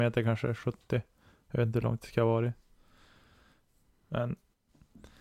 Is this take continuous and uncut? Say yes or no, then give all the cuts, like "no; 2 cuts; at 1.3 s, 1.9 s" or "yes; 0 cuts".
yes; 0 cuts